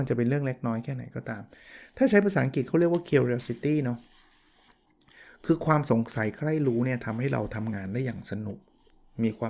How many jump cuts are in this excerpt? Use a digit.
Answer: 0